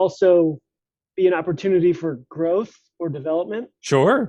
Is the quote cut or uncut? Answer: uncut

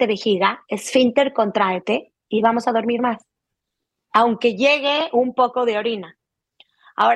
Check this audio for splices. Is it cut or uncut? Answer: uncut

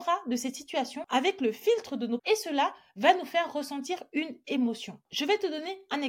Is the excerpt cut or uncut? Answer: cut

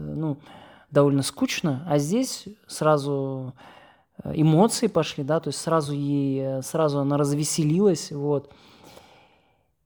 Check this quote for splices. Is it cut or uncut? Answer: uncut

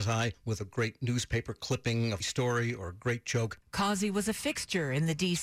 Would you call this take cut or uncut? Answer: cut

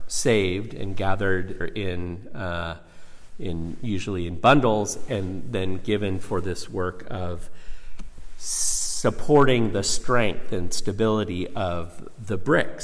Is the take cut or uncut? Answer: cut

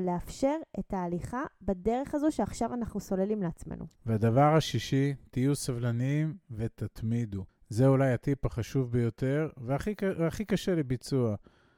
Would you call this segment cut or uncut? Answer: cut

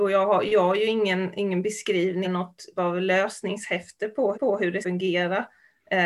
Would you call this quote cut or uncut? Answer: cut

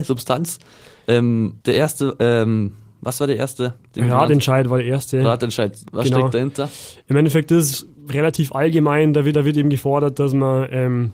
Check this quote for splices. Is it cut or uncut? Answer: cut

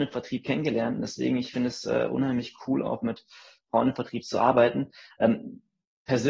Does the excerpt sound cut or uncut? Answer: uncut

